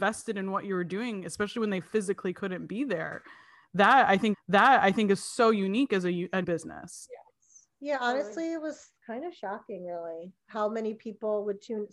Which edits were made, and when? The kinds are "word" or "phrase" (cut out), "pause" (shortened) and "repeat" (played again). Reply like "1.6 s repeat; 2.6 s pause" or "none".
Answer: 4.3 s repeat; 6.4 s word